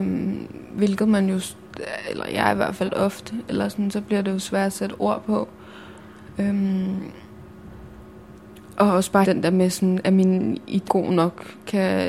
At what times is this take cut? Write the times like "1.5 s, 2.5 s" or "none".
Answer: 2.9 s, 9.2 s, 10.9 s